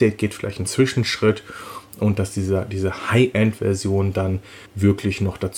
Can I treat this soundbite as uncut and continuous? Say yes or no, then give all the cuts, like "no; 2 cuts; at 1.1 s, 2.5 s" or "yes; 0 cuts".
no; 1 cut; at 4.7 s